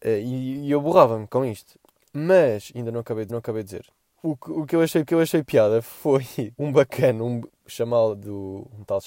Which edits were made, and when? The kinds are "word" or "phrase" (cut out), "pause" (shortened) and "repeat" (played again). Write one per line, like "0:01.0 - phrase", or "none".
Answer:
0:02.0 - pause
0:03.3 - repeat
0:05.1 - repeat
0:06.5 - pause
0:07.5 - word